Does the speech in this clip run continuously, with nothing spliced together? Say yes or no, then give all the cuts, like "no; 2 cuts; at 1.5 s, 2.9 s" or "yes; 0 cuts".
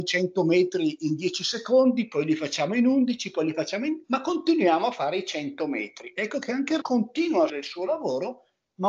no; 2 cuts; at 6.8 s, 7.5 s